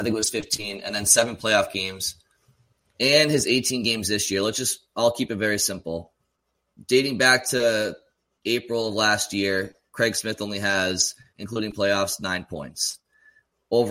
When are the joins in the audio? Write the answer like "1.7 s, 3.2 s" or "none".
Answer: none